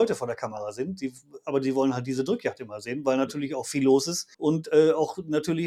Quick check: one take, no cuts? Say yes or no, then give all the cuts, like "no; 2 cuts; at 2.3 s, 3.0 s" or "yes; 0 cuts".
no; 1 cut; at 4.3 s